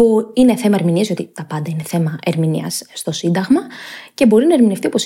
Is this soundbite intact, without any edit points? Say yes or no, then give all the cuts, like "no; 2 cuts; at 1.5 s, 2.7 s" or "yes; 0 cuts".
yes; 0 cuts